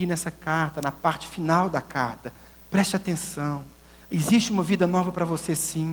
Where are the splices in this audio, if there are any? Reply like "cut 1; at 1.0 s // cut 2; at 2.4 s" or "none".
none